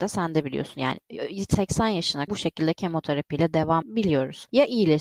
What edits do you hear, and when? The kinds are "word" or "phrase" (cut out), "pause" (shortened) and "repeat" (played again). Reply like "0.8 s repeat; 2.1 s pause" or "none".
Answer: 2.3 s word; 3.8 s word

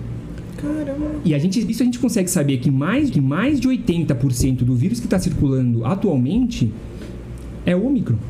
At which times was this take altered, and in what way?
1.7 s phrase; 3.1 s repeat

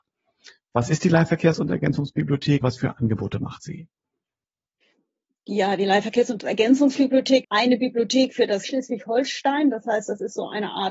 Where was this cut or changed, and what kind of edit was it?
2.6 s word; 7.4 s word; 8.7 s word

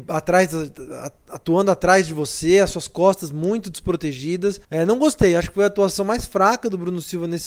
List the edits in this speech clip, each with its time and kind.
4.6 s pause

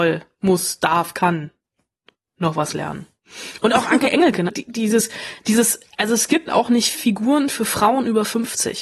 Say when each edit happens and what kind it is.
4.5 s word; 6.5 s word; 6.9 s word

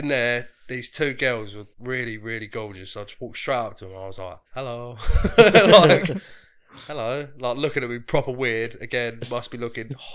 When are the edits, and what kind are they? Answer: 1.7 s pause; 4.5 s pause

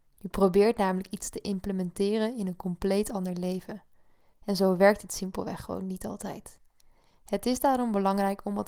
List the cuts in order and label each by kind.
none

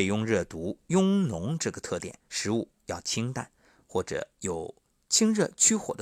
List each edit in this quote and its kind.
2.2 s pause

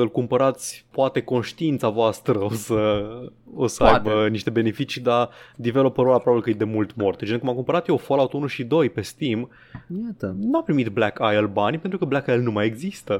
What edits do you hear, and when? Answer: none

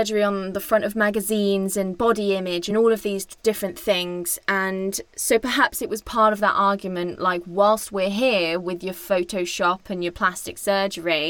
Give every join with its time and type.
none

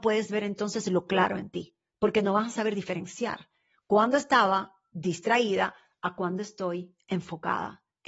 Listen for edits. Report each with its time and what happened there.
none

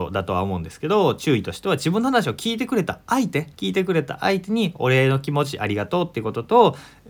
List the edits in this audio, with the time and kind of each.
3.5 s pause

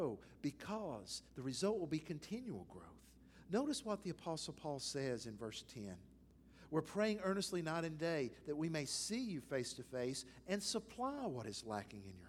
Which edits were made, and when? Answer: 1.3 s pause

